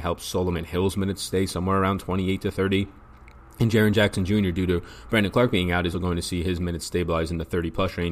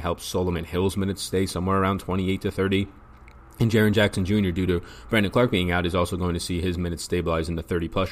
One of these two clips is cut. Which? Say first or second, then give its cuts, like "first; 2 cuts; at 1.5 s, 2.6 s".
first; 1 cut; at 5.9 s